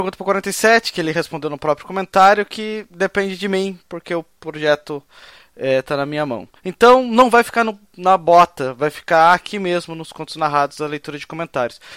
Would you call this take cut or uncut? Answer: cut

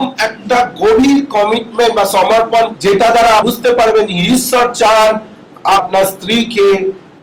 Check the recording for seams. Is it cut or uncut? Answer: cut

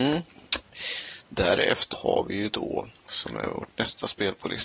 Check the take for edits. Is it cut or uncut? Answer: cut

